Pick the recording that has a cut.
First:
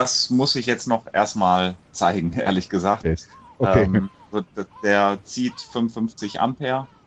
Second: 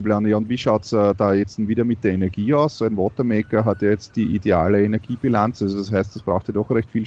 second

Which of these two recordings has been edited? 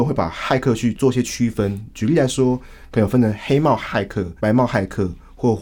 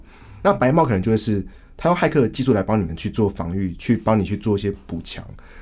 first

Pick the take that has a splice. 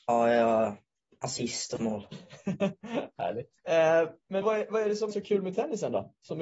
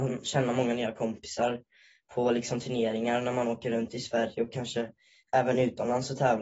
first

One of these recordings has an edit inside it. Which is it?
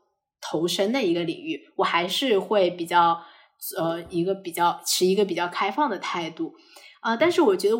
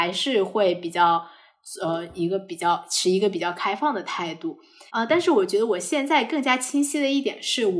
second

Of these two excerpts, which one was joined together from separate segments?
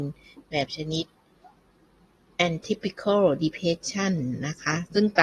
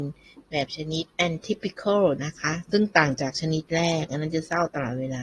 second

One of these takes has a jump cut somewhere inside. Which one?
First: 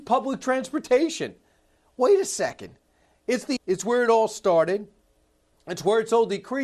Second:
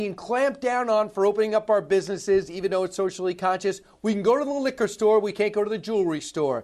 first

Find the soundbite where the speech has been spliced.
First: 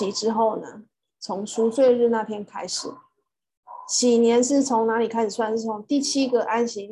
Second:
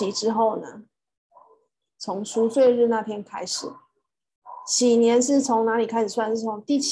first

